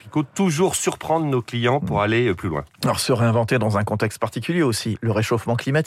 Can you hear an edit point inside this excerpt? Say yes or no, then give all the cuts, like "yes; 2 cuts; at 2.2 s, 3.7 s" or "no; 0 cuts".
no; 0 cuts